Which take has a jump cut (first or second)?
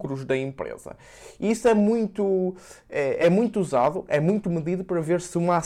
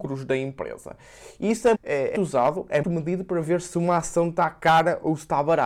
second